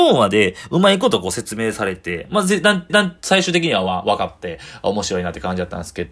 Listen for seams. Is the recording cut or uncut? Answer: cut